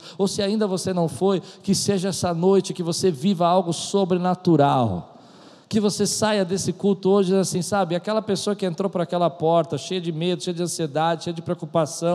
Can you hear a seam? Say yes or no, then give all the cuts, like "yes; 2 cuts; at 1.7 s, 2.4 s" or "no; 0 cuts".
no; 0 cuts